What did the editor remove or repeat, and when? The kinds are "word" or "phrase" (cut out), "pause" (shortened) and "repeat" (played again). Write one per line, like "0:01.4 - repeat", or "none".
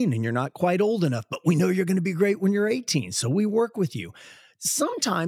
none